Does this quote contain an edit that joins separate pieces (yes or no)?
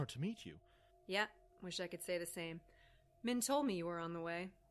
no